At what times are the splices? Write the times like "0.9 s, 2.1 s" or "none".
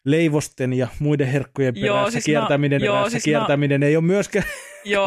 2.8 s